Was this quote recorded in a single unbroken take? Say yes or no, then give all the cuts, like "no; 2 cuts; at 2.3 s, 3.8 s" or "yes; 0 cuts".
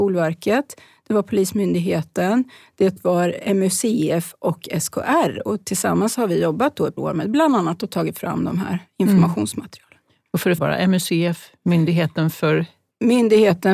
no; 2 cuts; at 7.0 s, 10.6 s